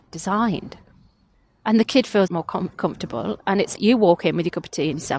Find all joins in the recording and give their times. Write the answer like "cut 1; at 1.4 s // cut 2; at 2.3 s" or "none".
cut 1; at 2.3 s // cut 2; at 3.8 s